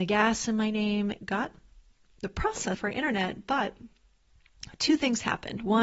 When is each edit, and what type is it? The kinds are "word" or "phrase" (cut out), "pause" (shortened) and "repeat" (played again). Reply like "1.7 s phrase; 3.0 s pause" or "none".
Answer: 1.2 s word; 2.7 s word